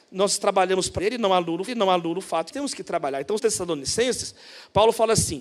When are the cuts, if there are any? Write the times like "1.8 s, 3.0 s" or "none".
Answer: 1.0 s, 1.7 s, 2.5 s, 3.4 s